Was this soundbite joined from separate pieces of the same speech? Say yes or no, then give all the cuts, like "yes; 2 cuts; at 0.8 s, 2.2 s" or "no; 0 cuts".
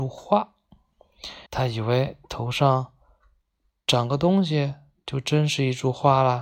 yes; 1 cut; at 1.5 s